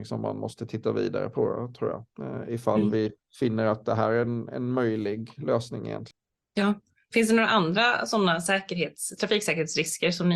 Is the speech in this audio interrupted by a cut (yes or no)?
no